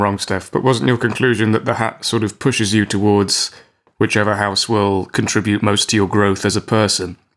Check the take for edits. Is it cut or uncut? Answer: uncut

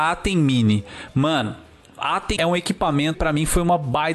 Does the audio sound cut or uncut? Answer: cut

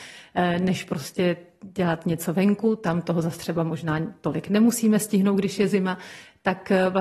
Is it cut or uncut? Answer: uncut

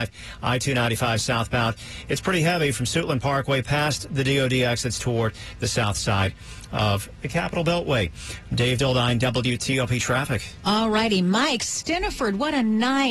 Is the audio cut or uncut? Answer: uncut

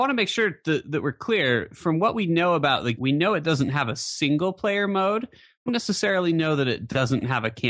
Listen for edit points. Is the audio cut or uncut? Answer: cut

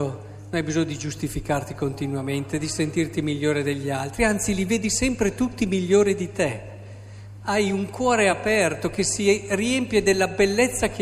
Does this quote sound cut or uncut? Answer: uncut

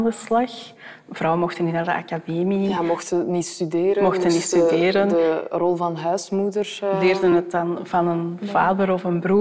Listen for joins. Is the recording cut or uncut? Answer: uncut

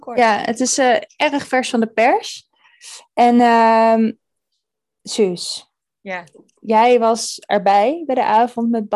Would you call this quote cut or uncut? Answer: uncut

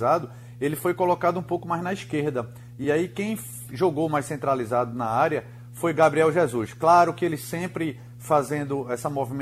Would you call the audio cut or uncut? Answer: uncut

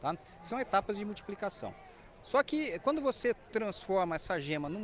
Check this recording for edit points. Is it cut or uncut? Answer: uncut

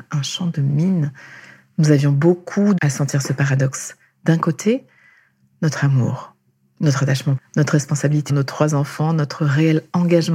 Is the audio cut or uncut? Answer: cut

